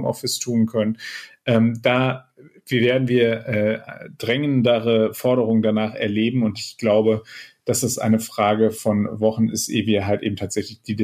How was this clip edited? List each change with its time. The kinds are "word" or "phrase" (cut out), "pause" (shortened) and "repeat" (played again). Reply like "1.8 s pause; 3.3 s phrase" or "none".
none

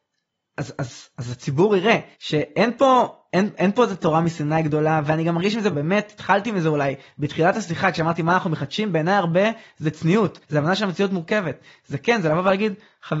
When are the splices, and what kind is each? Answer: 2.1 s pause; 5.7 s word; 10.4 s pause

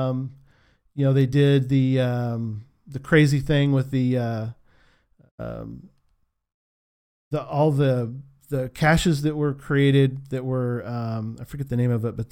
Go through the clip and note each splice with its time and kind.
none

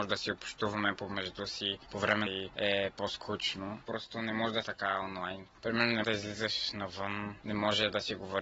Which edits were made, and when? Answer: 2.3 s phrase; 4.6 s phrase; 6.0 s word

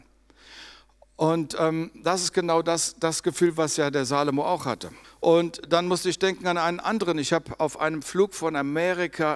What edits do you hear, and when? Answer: 5.0 s pause

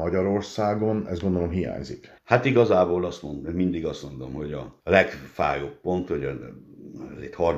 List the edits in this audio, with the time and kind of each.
2.2 s pause

